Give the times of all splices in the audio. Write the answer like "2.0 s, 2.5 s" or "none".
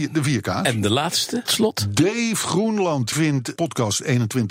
1.5 s, 3.1 s, 3.6 s